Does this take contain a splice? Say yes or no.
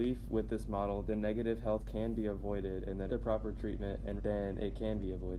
yes